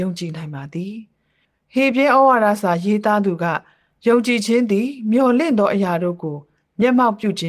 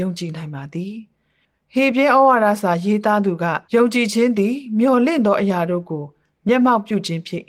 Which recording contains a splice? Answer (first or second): second